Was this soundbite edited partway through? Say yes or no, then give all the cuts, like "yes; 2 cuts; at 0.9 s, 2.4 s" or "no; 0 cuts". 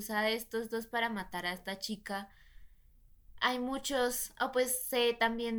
no; 0 cuts